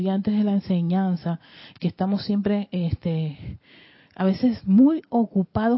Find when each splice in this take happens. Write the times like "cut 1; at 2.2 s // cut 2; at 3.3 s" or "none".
cut 1; at 1.7 s